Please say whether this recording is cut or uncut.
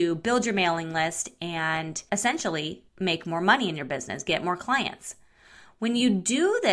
cut